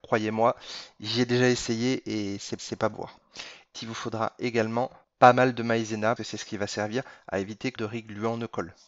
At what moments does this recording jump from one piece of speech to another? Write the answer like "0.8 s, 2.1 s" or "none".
2.6 s, 2.9 s, 3.7 s, 5.0 s, 6.2 s, 7.8 s

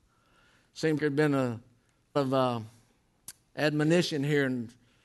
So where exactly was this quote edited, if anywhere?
1.0 s, 2.2 s

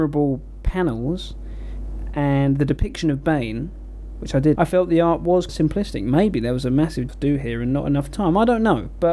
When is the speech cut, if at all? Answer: 4.6 s, 5.5 s, 7.1 s

